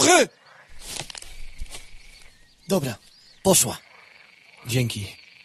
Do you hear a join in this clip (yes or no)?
no